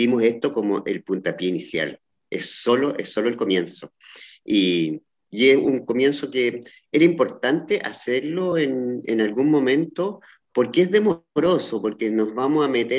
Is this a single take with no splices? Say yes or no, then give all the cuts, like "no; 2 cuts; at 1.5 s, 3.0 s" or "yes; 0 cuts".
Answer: yes; 0 cuts